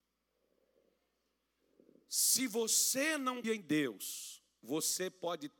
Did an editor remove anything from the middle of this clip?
yes; 1 cut; at 3.4 s

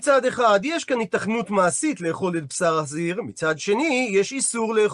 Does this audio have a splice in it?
no; 0 cuts

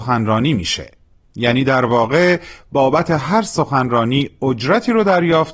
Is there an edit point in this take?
no; 0 cuts

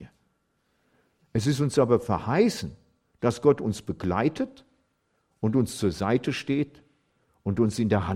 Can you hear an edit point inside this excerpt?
no; 0 cuts

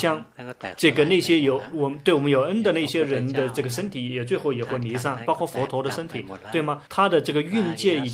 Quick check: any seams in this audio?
yes; 1 cut; at 6.9 s

